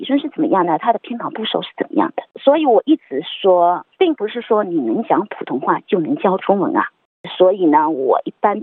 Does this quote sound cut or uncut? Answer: cut